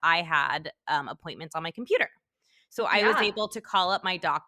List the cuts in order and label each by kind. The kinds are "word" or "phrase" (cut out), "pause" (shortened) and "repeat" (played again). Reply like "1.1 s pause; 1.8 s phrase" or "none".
none

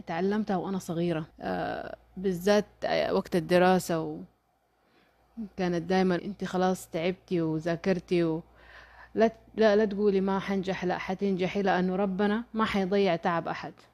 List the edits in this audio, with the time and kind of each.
1.3 s pause; 6.2 s phrase

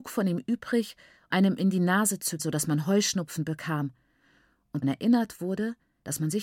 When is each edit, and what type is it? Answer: 1.3 s word; 2.4 s word; 4.8 s word

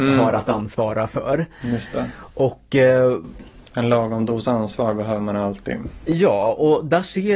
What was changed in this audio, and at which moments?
none

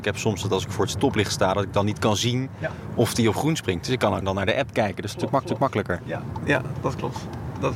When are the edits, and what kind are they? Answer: 4.2 s phrase; 5.4 s repeat

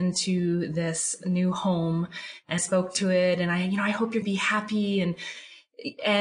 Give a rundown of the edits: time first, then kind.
2.6 s word; 4.2 s phrase

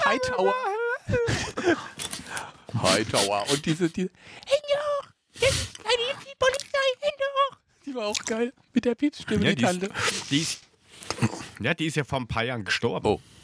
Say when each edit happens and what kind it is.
none

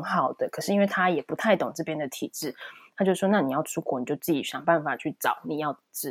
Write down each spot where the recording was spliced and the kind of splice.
none

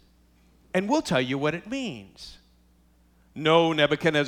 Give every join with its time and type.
none

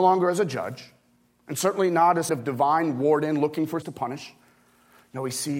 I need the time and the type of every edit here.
2.3 s phrase; 3.8 s word

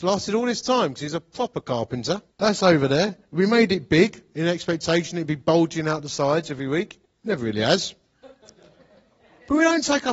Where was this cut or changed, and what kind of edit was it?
2.3 s pause; 7.1 s pause

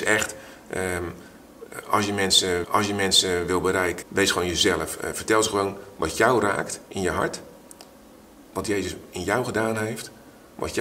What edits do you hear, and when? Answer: 2.6 s repeat; 4.0 s word; 8.5 s pause

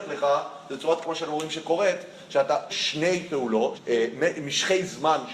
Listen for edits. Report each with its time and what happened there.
1.0 s word; 2.7 s word; 3.7 s word

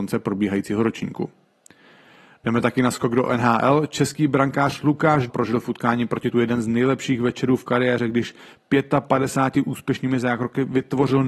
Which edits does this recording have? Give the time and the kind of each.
5.3 s word; 6.3 s word

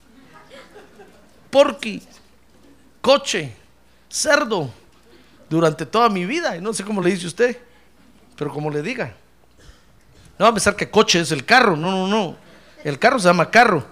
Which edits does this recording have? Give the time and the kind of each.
none

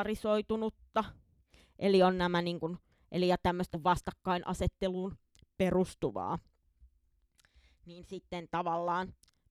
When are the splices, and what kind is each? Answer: 3.7 s phrase

